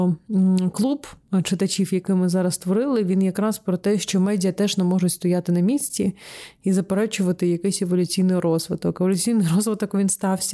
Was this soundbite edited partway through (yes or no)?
no